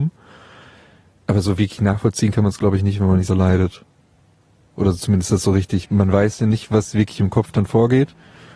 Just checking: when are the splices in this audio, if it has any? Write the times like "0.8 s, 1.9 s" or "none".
3.3 s, 5.8 s